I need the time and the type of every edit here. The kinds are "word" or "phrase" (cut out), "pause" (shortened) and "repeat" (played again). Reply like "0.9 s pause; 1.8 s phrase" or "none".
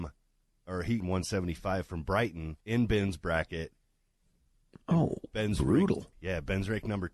1.0 s phrase; 2.6 s pause; 4.8 s pause; 6.1 s word